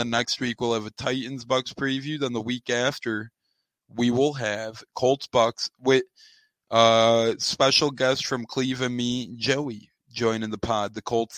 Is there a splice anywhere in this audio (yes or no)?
no